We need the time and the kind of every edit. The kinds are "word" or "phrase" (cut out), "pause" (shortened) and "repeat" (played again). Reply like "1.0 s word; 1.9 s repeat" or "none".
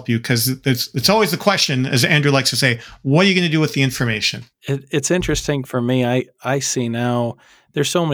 4.5 s pause; 5.7 s word